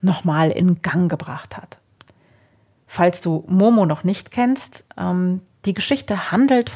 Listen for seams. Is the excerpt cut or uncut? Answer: uncut